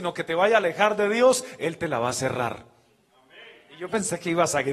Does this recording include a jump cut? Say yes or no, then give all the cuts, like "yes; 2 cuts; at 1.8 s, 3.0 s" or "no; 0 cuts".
no; 0 cuts